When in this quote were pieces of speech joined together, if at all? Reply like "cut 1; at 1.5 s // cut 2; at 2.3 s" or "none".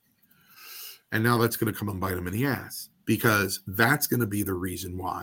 cut 1; at 3.0 s